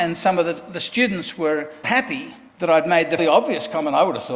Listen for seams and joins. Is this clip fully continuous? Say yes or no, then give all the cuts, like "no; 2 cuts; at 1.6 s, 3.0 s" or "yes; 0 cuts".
no; 3 cuts; at 1.8 s, 2.5 s, 3.2 s